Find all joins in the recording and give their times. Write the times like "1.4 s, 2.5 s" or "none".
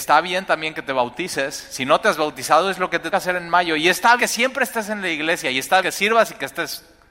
3.1 s, 4.2 s, 5.8 s